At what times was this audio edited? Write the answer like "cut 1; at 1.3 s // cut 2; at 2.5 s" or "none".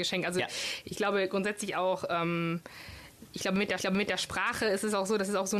cut 1; at 3.8 s